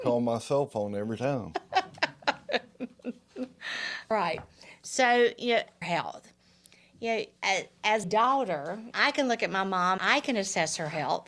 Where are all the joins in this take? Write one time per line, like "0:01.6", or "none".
0:04.1
0:05.8
0:07.4
0:08.0
0:08.9
0:10.0